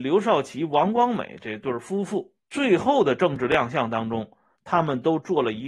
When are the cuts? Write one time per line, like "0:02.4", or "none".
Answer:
0:02.4